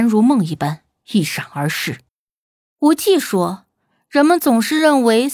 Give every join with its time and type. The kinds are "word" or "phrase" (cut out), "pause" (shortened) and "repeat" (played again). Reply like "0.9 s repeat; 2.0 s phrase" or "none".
2.1 s pause

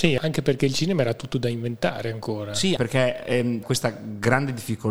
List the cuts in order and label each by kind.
2.8 s word; 3.6 s word

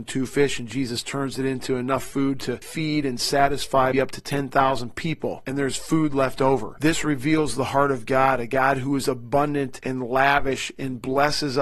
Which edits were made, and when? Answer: 3.9 s word

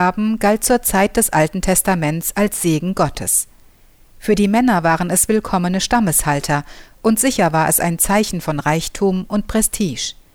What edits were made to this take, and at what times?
none

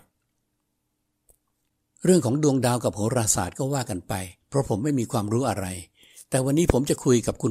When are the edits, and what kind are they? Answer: 4.4 s pause

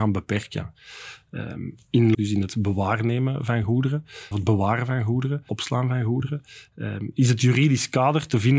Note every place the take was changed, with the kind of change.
2.1 s word; 4.3 s word; 5.5 s word

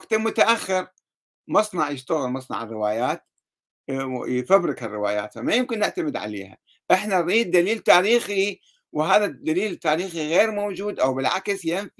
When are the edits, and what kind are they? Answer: none

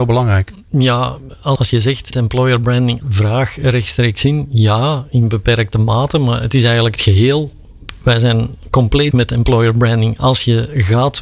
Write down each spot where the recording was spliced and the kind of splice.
1.6 s word; 2.1 s word; 3.0 s word; 7.0 s word; 9.1 s word

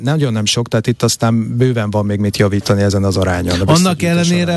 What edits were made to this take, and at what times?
none

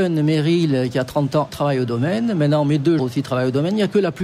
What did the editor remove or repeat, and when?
1.5 s word; 3.0 s word

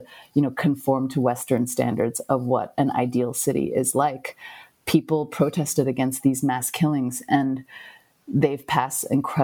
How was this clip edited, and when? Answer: none

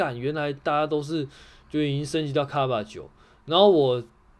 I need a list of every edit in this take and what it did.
none

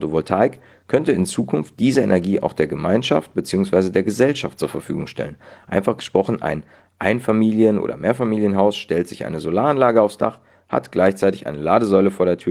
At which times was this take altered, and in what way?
none

